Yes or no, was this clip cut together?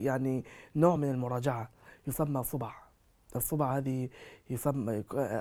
no